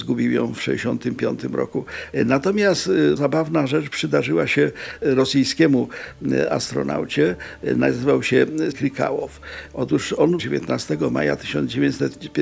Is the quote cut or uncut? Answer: cut